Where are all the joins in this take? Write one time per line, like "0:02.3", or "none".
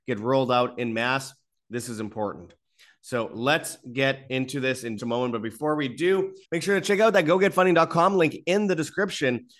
0:05.0
0:06.4